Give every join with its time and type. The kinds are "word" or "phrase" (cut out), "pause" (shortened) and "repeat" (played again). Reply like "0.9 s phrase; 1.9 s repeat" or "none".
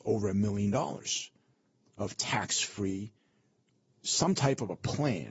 none